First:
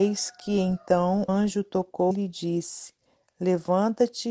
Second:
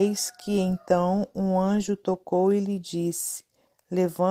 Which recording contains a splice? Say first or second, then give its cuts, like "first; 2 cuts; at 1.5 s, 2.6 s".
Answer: first; 2 cuts; at 1.3 s, 2.1 s